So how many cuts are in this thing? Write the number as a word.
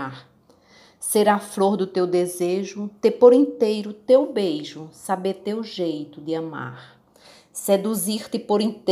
zero